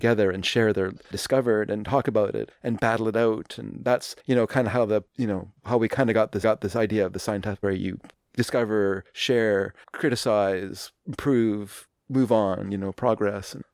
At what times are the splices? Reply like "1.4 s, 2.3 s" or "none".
1.1 s, 2.5 s, 4.2 s, 5.1 s, 6.4 s, 7.6 s, 9.8 s